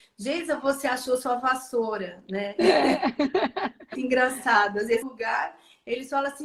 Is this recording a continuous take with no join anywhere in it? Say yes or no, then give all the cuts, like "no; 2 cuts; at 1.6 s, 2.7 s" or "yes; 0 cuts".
no; 2 cuts; at 4.0 s, 5.0 s